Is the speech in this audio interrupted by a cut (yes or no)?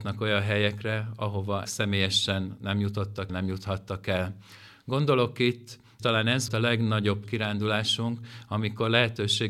yes